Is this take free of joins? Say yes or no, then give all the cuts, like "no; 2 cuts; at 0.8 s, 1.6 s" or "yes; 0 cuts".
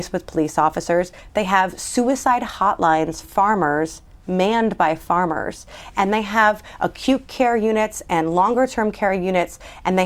no; 1 cut; at 3.2 s